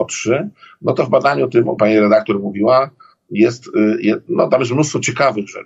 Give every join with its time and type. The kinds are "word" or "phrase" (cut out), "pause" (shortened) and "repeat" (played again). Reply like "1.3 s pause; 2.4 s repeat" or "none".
1.8 s word